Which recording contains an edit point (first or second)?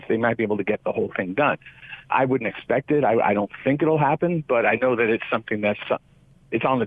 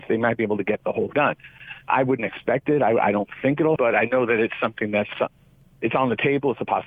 second